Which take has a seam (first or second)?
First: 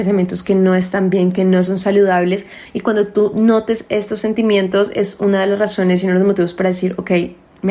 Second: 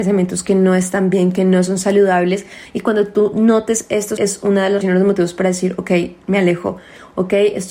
second